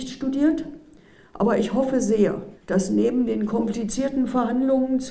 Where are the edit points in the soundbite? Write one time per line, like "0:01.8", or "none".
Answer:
0:02.6